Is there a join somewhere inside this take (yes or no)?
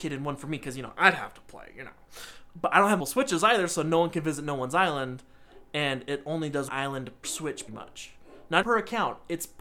yes